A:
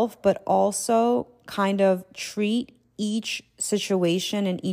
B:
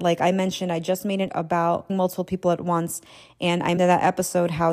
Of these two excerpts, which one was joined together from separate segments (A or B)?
B